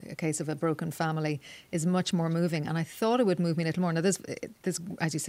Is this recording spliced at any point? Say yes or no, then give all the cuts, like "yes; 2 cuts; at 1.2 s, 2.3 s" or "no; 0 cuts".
no; 0 cuts